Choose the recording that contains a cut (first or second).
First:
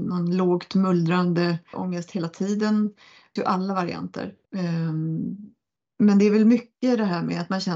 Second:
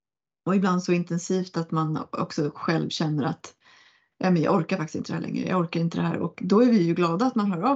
first